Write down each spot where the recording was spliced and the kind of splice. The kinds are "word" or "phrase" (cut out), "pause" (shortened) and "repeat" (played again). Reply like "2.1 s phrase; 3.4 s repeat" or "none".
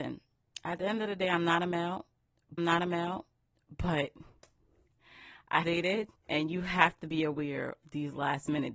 2.6 s repeat; 5.6 s word; 6.2 s pause; 7.8 s word